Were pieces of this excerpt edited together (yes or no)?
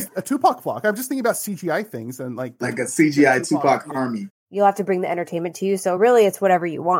no